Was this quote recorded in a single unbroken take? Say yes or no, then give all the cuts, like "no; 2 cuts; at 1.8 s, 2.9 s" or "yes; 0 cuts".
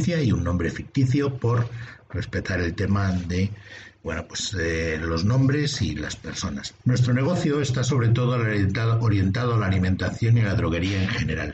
no; 1 cut; at 4.0 s